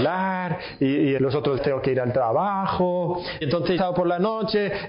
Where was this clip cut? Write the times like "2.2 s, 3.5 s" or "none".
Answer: 1.2 s, 1.6 s, 3.4 s, 3.8 s